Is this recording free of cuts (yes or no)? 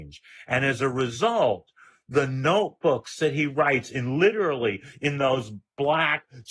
yes